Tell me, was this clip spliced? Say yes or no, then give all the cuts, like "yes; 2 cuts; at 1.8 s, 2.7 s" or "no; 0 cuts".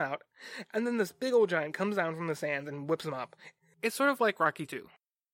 no; 0 cuts